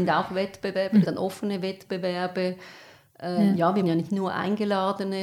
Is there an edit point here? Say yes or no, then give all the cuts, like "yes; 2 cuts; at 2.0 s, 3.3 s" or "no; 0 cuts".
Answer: yes; 2 cuts; at 1.1 s, 3.8 s